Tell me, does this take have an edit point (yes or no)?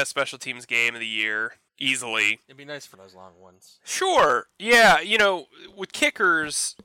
yes